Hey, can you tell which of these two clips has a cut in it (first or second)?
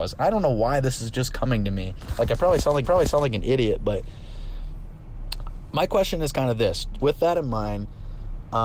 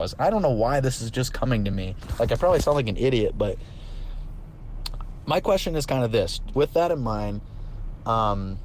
first